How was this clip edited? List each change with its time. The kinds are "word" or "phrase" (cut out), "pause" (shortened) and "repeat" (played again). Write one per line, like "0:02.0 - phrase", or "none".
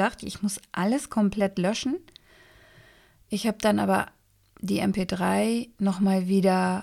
none